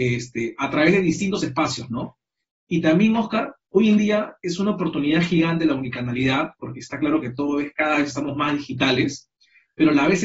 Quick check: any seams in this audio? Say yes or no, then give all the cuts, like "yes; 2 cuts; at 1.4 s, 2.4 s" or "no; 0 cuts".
no; 0 cuts